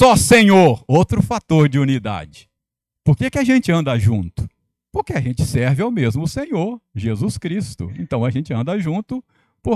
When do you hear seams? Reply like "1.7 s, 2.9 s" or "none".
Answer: none